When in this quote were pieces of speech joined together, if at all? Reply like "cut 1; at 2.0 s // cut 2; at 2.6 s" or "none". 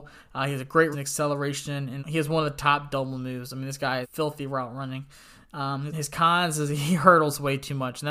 cut 1; at 0.9 s // cut 2; at 2.0 s // cut 3; at 4.0 s // cut 4; at 5.9 s